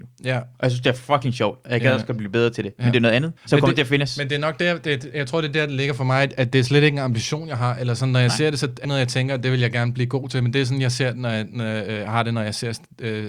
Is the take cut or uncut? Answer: cut